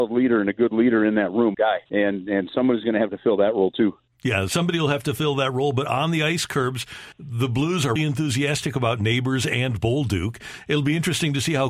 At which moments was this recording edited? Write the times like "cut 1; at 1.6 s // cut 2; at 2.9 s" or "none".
cut 1; at 1.5 s // cut 2; at 1.9 s // cut 3; at 7.1 s // cut 4; at 8.0 s